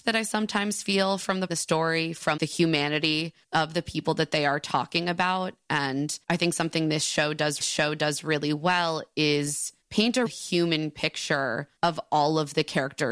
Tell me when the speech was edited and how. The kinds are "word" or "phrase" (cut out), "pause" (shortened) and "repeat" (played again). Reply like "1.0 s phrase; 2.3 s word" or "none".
1.5 s phrase; 2.4 s word; 3.4 s pause; 6.2 s pause; 7.6 s repeat; 9.8 s pause; 10.3 s word; 11.8 s pause